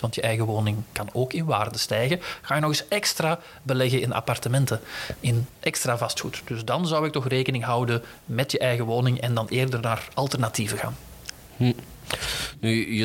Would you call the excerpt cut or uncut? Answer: uncut